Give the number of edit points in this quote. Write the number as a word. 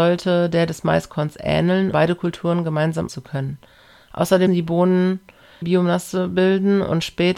four